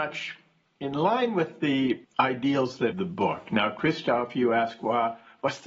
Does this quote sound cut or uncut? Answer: cut